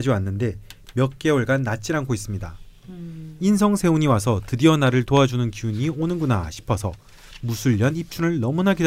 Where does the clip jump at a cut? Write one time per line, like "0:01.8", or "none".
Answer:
none